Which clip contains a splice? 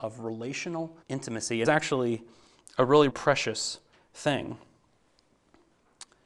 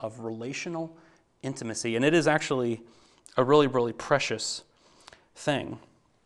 first; 4 cuts; at 1.0 s, 1.6 s, 3.1 s, 3.9 s

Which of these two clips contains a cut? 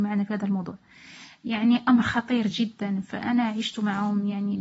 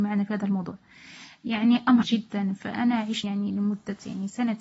second; 2 cuts; at 2.0 s, 3.2 s

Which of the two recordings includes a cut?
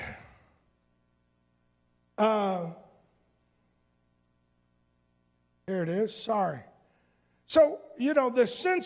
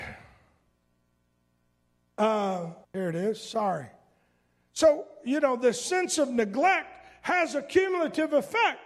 second; 1 cut; at 2.8 s

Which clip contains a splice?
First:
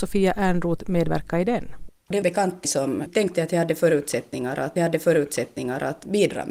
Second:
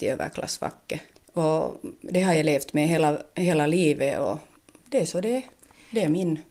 first; 3 cuts; at 2.2 s, 2.6 s, 4.8 s

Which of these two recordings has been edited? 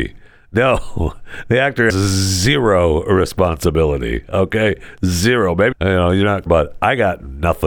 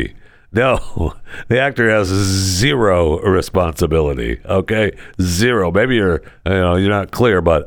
first; 3 cuts; at 1.9 s, 5.7 s, 6.5 s

